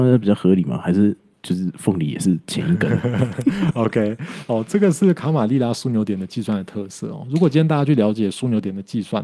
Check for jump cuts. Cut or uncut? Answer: uncut